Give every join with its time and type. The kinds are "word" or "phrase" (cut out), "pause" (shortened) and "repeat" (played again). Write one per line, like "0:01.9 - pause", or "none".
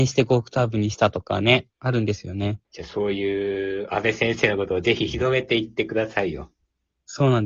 0:01.7 - pause
0:02.6 - pause